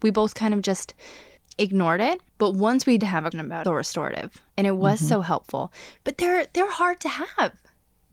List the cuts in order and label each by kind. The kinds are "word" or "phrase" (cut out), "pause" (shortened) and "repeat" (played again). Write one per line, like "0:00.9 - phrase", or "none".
0:01.4 - pause
0:02.3 - pause
0:03.0 - word
0:03.3 - word
0:03.6 - phrase
0:04.5 - pause